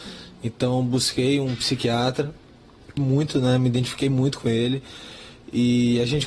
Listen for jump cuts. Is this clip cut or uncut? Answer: cut